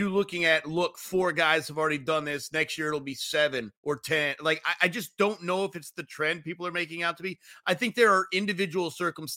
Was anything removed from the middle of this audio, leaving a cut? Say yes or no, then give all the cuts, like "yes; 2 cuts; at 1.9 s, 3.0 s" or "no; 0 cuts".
yes; 1 cut; at 3.8 s